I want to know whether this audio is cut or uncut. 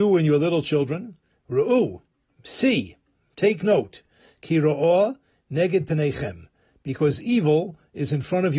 uncut